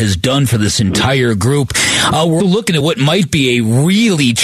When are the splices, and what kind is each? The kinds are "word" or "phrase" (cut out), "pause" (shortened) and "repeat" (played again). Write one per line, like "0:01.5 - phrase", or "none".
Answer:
0:02.4 - word